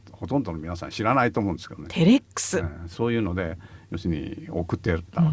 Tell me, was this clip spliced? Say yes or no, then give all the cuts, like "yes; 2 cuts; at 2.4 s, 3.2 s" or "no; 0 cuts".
no; 0 cuts